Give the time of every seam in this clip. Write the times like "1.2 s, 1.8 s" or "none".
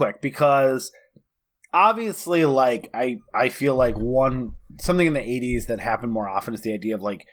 none